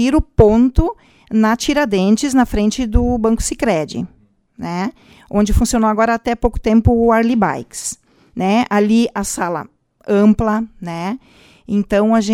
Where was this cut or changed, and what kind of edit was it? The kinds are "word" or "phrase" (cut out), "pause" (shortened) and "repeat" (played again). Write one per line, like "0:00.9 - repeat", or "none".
none